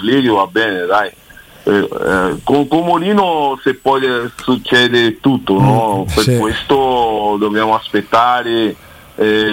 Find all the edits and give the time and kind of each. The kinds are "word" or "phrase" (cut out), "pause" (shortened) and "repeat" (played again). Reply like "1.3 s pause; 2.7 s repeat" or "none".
none